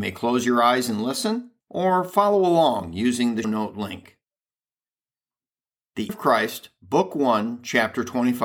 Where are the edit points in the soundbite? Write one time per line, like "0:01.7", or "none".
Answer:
0:01.6
0:03.4
0:06.1